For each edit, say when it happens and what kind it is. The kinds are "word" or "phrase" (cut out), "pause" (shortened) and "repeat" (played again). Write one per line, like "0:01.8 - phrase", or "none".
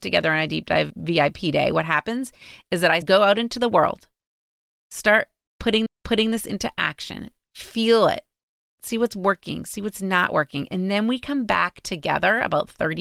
0:03.0 - word
0:05.9 - repeat